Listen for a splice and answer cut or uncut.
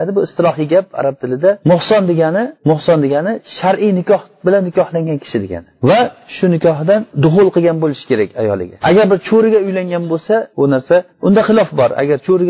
cut